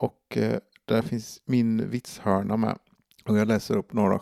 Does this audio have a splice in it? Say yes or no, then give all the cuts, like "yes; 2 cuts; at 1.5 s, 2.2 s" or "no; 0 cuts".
yes; 1 cut; at 3.0 s